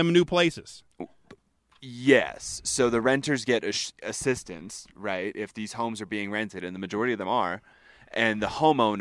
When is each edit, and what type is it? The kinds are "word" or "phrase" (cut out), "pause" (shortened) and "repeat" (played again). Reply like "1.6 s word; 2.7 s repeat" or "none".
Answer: none

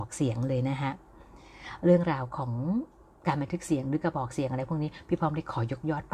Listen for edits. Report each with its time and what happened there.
none

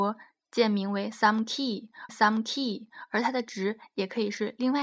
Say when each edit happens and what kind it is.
2.1 s repeat

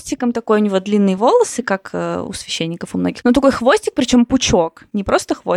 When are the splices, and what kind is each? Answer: none

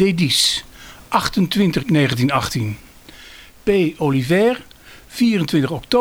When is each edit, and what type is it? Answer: 1.8 s word

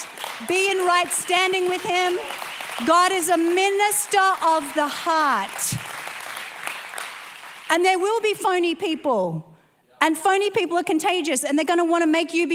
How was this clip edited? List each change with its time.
none

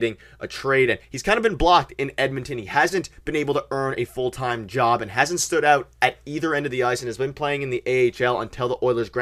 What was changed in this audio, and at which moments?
1.0 s pause

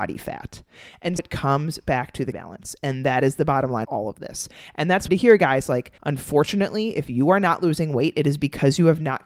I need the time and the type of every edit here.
1.2 s word; 2.3 s word; 3.8 s word; 5.1 s phrase; 6.0 s pause

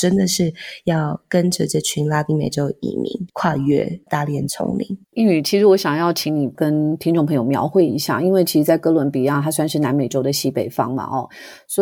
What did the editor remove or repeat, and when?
5.0 s pause

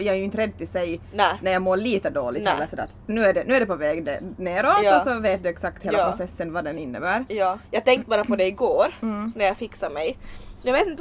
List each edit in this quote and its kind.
7.6 s pause

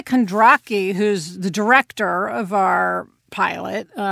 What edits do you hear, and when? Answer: none

